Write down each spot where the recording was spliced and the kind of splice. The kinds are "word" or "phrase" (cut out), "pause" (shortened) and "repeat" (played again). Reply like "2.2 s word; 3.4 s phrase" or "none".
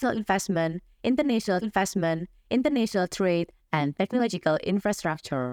1.6 s repeat